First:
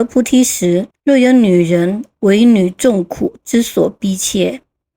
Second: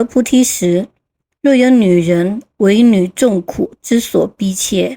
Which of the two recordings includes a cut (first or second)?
first